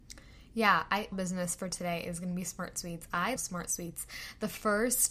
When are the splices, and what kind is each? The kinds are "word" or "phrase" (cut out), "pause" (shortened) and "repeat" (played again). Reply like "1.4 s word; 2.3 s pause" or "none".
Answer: 1.1 s phrase; 3.4 s word